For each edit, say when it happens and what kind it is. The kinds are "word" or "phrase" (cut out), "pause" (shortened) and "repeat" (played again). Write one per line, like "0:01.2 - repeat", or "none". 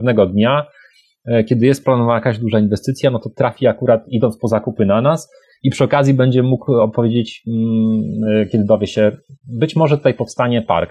none

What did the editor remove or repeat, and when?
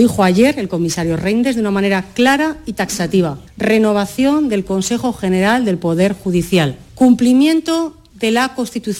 0:06.9 - pause

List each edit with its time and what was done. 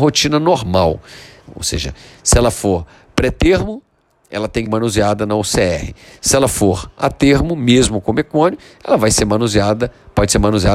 0:04.7 - word

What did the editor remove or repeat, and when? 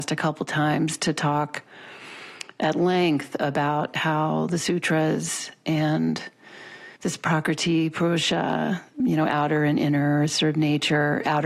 0:07.0 - pause
0:09.0 - word

